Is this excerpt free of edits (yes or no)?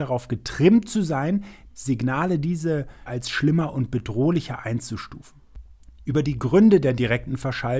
no